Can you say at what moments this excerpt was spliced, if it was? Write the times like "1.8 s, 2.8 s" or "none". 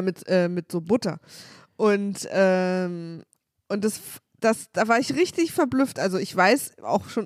none